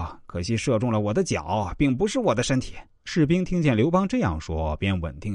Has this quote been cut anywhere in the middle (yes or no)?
yes